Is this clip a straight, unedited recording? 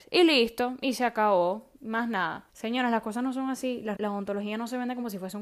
no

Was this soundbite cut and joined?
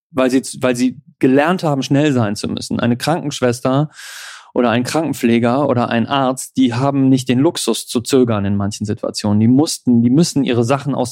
no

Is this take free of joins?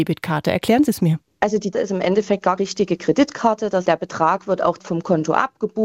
no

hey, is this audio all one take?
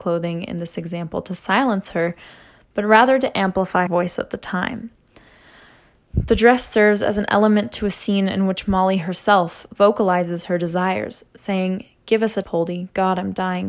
no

